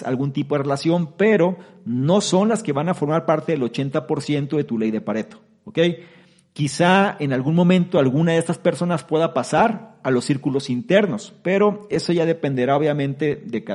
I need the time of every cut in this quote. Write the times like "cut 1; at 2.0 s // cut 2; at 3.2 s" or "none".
none